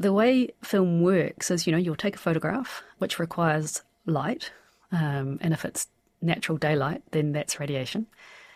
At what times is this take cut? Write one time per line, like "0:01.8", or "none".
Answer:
none